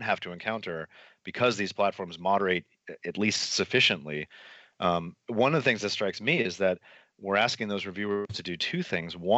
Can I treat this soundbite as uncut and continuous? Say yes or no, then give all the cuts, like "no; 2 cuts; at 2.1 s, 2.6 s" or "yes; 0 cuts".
yes; 0 cuts